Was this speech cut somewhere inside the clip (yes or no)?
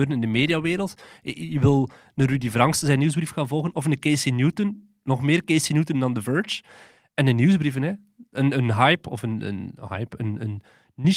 no